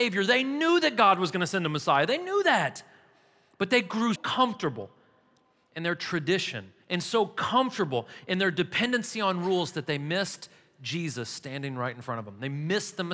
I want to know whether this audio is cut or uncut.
cut